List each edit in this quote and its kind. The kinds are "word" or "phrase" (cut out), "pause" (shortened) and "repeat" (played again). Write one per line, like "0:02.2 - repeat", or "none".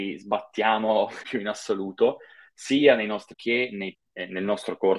0:01.2 - word
0:03.3 - word
0:03.9 - word

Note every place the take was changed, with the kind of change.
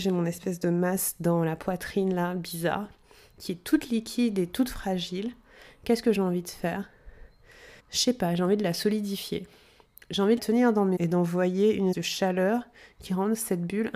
0:07.8 - pause
0:10.4 - word
0:11.0 - word
0:11.9 - word

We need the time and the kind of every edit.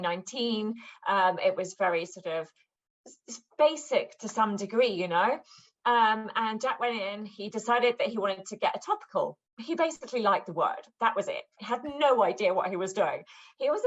none

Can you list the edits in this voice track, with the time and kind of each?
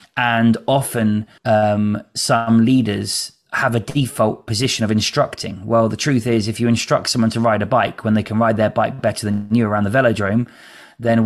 0:01.4 - pause

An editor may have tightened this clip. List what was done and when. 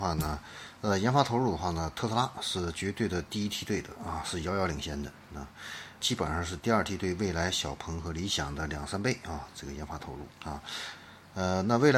0:06.0 - word

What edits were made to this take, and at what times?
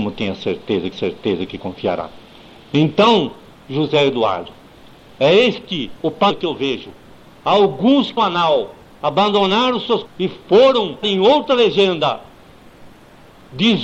0:00.9 - repeat
0:08.2 - word
0:08.8 - pause
0:10.1 - word
0:11.0 - word

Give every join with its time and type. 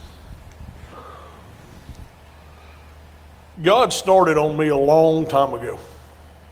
none

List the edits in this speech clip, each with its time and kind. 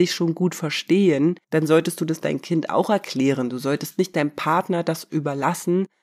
0:01.4 - pause

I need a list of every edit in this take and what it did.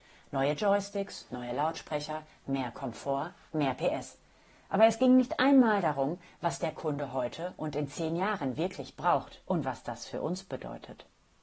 0:09.5 - pause

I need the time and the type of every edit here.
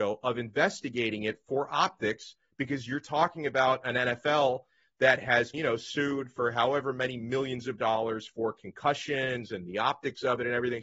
0:05.5 - word

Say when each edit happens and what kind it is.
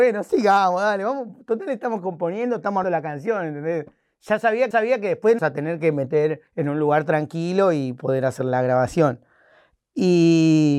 0:02.8 - word
0:04.7 - repeat
0:05.4 - phrase
0:06.5 - pause

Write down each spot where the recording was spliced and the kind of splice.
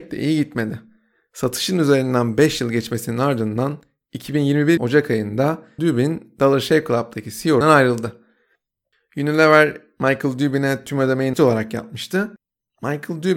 0:04.8 - word
0:05.8 - word
0:07.6 - word
0:11.3 - word

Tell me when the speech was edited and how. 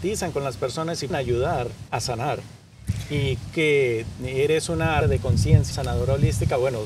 0:01.1 - word
0:01.9 - pause
0:03.5 - word
0:05.0 - word
0:05.7 - word

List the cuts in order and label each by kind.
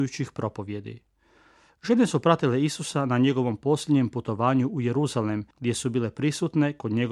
0:05.5 - pause

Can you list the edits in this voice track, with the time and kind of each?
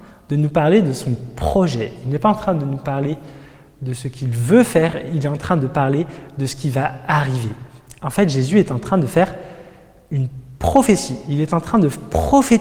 none

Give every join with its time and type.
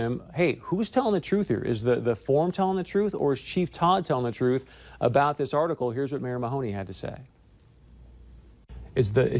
none

